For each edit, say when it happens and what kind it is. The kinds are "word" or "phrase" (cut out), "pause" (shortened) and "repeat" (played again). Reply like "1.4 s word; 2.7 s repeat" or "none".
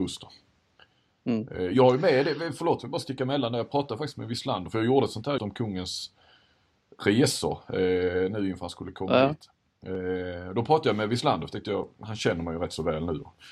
5.4 s word

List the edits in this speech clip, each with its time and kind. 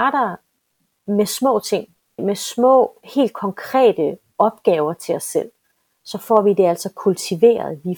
2.2 s word

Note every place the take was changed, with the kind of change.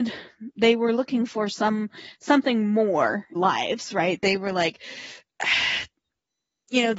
3.3 s phrase

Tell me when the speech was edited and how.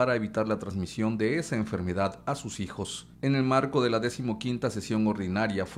3.1 s pause

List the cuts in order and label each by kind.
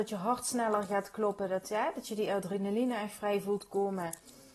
none

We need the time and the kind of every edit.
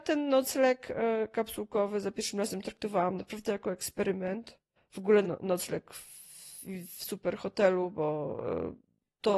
4.8 s pause; 5.2 s phrase

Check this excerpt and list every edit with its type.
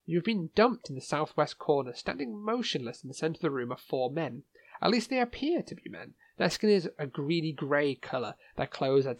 none

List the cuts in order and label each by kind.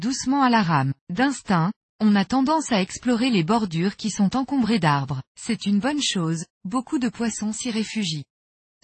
1.0 s pause; 5.3 s pause

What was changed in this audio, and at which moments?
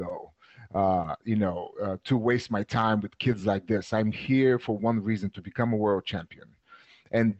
none

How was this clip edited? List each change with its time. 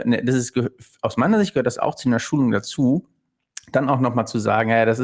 none

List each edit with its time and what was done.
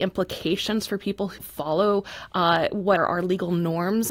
1.4 s word; 3.0 s word

